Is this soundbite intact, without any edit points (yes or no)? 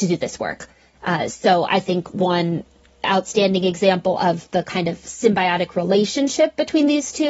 yes